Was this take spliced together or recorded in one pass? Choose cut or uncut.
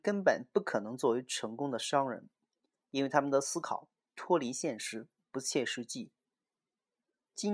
uncut